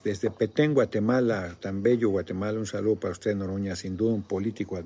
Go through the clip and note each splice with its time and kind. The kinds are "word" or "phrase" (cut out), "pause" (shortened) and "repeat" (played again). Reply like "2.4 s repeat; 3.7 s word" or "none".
none